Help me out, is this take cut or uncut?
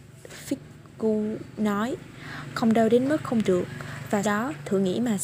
cut